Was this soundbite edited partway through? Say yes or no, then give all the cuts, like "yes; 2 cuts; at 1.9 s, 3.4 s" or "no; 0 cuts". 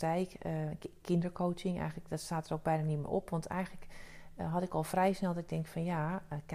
no; 0 cuts